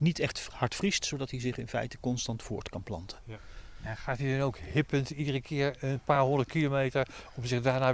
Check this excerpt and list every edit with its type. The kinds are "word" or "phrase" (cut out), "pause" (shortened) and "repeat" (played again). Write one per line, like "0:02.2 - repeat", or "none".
none